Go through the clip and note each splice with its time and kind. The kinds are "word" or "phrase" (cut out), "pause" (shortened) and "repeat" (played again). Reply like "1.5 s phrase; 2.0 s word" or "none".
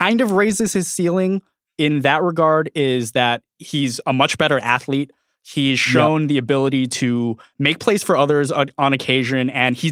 none